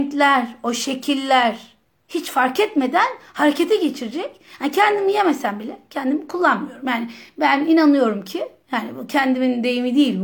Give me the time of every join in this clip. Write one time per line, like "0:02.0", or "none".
0:01.9

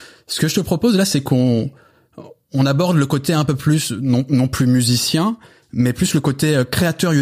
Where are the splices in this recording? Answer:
none

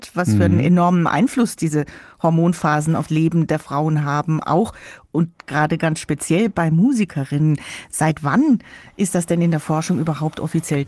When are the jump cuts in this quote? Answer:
0:03.1

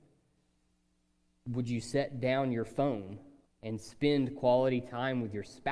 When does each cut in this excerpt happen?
0:03.5

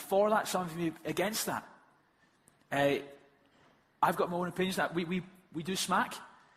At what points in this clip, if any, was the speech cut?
none

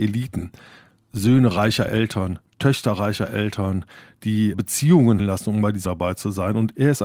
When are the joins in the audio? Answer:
0:04.5
0:05.2
0:05.8

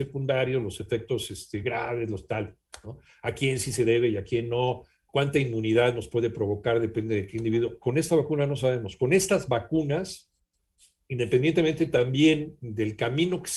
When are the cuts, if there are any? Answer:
none

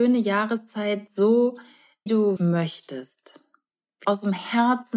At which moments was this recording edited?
0:02.1
0:02.4
0:04.0

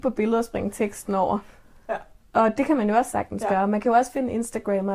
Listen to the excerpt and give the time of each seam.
none

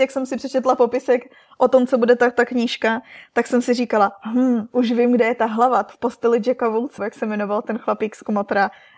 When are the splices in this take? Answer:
0:05.9
0:07.0

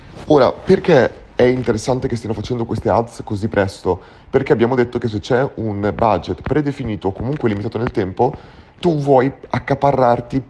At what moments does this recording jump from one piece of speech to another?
0:02.7

